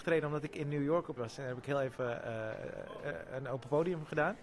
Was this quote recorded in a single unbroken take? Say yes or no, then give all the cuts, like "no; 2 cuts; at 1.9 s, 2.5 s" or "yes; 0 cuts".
no; 1 cut; at 1.2 s